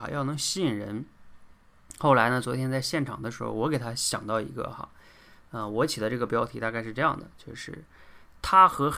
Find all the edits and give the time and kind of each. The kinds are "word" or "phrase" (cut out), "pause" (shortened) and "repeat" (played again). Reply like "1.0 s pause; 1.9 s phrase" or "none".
none